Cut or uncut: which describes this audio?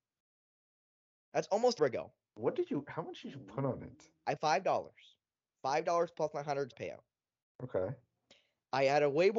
cut